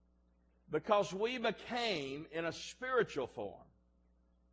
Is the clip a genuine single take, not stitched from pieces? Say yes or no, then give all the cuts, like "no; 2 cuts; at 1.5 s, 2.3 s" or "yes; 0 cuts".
yes; 0 cuts